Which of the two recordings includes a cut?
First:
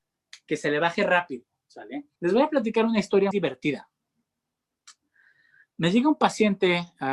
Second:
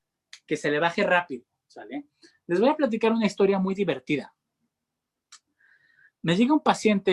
first; 2 cuts; at 2.2 s, 3.3 s

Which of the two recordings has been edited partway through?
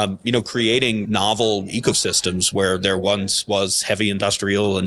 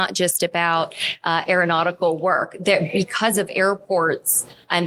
first; 1 cut; at 1.1 s

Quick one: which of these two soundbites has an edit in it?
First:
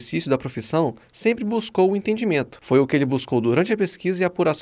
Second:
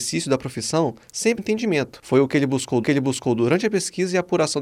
second; 2 cuts; at 1.4 s, 2.8 s

